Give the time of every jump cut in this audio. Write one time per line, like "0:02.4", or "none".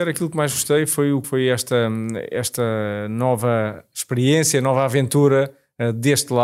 0:01.2